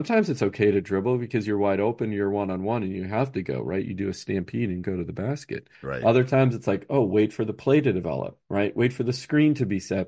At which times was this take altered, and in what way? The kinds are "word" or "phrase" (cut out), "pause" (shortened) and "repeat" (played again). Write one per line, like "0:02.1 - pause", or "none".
0:05.7 - pause
0:08.4 - pause